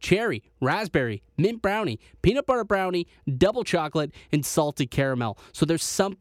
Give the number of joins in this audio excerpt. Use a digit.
0